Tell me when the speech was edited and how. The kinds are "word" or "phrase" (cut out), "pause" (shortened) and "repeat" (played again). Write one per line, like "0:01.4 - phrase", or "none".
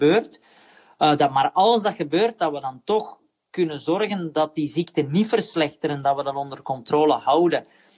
none